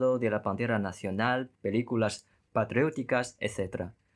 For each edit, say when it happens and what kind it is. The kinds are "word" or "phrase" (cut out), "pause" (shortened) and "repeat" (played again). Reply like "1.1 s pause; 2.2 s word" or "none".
1.5 s pause